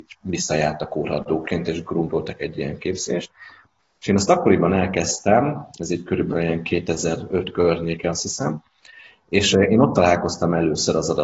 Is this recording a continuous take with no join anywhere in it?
yes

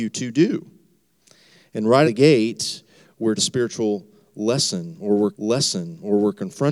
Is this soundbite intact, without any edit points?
no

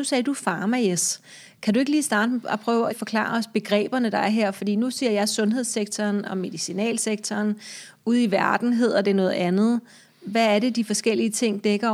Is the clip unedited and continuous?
no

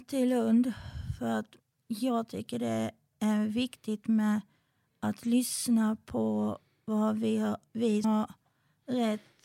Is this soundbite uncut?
no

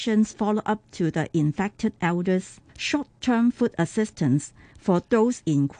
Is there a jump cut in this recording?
yes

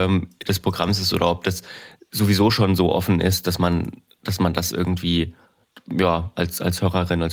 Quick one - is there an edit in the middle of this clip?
no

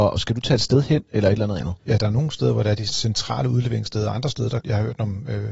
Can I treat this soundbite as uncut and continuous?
no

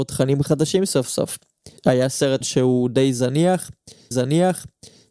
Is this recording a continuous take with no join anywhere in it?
no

